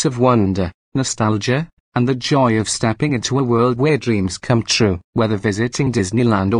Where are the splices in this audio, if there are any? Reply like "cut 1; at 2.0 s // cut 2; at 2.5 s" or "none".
none